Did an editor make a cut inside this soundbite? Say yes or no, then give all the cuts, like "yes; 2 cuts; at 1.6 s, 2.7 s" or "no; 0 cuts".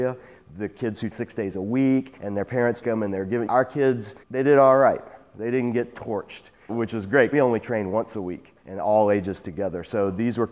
yes; 8 cuts; at 1.1 s, 2.2 s, 2.8 s, 3.5 s, 4.2 s, 6.7 s, 7.3 s, 8.6 s